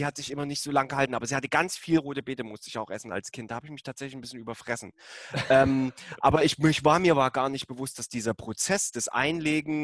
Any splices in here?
no; 0 cuts

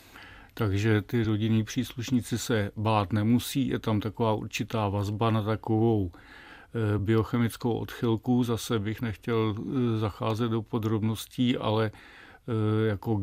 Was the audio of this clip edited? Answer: no; 0 cuts

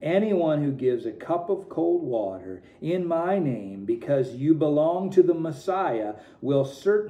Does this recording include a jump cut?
no; 0 cuts

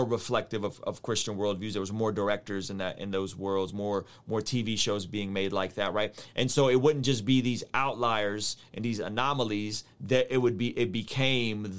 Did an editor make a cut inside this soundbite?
no; 0 cuts

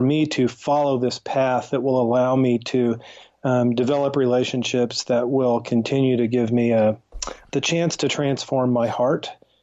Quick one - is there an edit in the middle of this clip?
no; 0 cuts

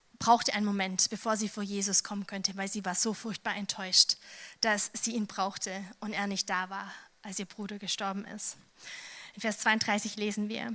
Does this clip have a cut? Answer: no; 0 cuts

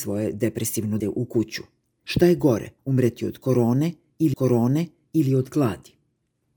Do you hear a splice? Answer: yes; 3 cuts; at 1.0 s, 2.8 s, 4.3 s

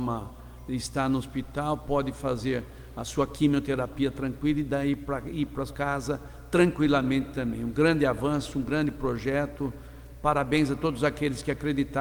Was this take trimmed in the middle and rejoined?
yes; 1 cut; at 5.7 s

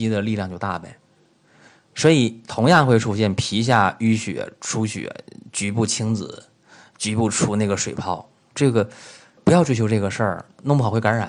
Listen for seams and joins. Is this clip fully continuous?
yes; 0 cuts

